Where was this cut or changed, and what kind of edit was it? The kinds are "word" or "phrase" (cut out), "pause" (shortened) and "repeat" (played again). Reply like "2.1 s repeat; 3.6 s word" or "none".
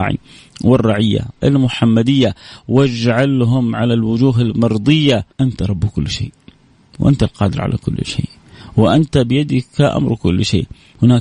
1.4 s phrase; 5.3 s pause